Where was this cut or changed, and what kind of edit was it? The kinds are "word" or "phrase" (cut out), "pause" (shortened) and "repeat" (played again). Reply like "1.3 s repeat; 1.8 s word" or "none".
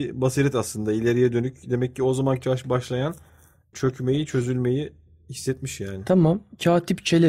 2.4 s word